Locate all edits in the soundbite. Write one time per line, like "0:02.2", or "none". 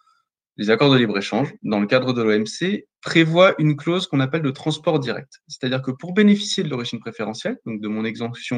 0:02.9